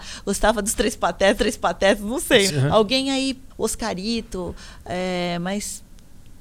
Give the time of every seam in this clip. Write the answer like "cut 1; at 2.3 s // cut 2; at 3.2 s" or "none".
cut 1; at 1.4 s // cut 2; at 2.5 s // cut 3; at 3.5 s